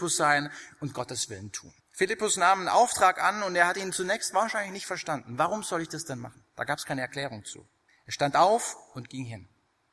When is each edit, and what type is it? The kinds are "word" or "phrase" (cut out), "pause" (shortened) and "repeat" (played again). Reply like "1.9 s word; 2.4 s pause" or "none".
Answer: 1.8 s pause; 6.5 s pause; 7.9 s pause